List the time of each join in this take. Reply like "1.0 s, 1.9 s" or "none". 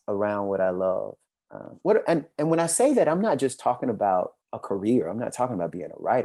1.3 s, 4.4 s